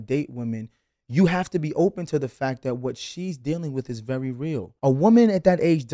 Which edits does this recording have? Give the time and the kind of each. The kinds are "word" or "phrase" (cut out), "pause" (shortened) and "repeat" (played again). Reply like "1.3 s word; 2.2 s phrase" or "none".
4.8 s pause